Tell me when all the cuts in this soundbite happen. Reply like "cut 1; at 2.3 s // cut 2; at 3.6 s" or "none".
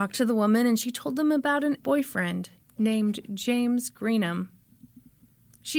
cut 1; at 1.8 s